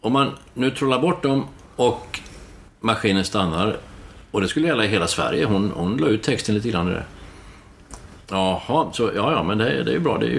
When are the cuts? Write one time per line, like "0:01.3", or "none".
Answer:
none